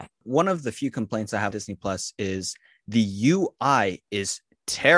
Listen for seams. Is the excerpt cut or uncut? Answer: cut